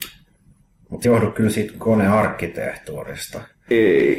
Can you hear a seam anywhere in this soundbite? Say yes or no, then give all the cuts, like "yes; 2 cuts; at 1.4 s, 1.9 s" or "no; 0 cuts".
yes; 1 cut; at 1.0 s